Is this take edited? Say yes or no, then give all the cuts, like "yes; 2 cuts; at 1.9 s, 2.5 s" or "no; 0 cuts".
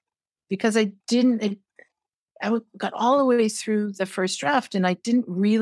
yes; 1 cut; at 1.0 s